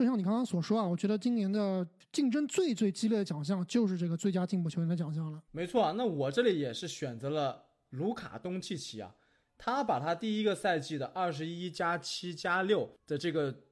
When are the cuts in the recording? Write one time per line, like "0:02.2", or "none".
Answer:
0:05.5